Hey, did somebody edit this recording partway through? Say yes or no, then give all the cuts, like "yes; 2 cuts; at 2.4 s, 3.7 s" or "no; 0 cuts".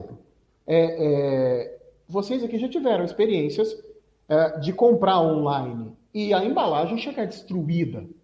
no; 0 cuts